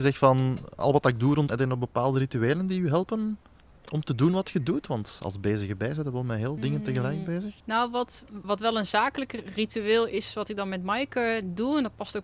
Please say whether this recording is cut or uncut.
cut